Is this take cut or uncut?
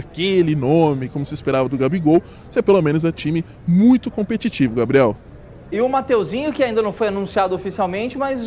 cut